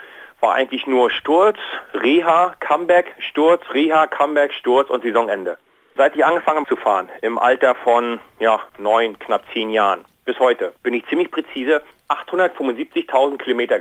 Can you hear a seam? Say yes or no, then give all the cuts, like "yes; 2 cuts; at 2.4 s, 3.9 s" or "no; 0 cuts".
yes; 4 cuts; at 6.6 s, 8.7 s, 10.8 s, 11.9 s